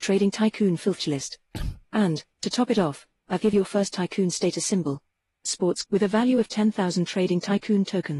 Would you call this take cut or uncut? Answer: cut